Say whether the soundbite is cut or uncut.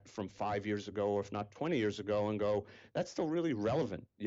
uncut